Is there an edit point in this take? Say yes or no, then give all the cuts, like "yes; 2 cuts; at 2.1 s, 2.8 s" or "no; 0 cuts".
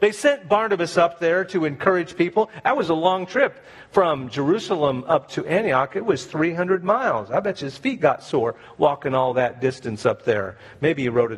no; 0 cuts